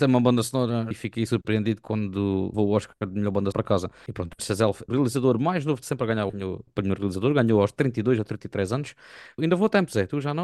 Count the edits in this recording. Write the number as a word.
nine